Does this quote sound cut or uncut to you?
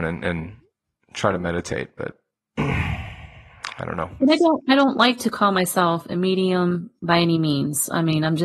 uncut